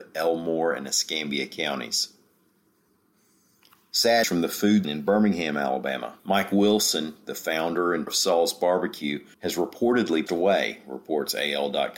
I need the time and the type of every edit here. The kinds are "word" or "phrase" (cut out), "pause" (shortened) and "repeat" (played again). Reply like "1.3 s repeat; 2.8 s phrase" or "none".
4.2 s word; 4.8 s word; 6.2 s pause; 8.1 s word; 9.3 s pause; 10.3 s word